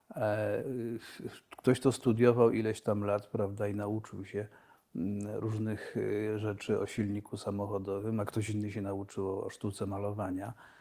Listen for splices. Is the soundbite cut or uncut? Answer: uncut